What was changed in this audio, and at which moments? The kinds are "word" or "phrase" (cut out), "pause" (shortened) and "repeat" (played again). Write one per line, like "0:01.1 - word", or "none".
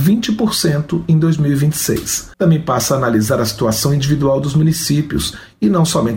0:02.3 - pause